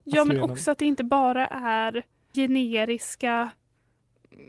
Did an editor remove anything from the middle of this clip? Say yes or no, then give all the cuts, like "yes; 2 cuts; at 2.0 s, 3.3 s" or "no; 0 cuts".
yes; 1 cut; at 2.3 s